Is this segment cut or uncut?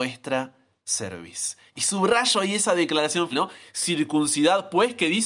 cut